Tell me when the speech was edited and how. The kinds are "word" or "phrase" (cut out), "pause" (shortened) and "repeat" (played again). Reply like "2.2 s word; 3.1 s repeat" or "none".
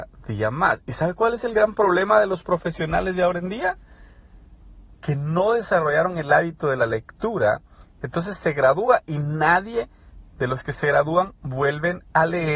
none